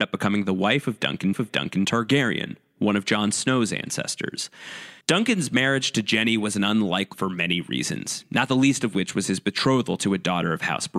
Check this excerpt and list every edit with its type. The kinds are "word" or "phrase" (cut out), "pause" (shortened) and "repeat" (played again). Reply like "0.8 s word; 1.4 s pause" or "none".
1.3 s repeat; 5.0 s pause; 7.1 s word